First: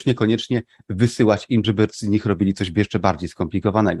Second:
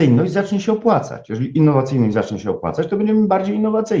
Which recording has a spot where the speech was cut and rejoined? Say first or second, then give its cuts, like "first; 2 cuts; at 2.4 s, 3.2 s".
first; 1 cut; at 1.6 s